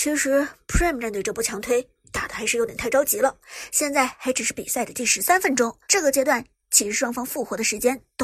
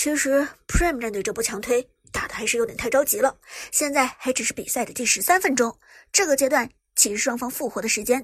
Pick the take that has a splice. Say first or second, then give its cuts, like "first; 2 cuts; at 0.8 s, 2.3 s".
first; 1 cut; at 5.8 s